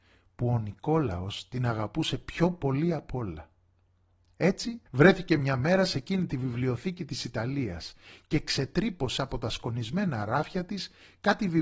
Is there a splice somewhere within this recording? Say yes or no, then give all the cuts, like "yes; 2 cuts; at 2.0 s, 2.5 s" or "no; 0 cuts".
yes; 2 cuts; at 4.9 s, 9.2 s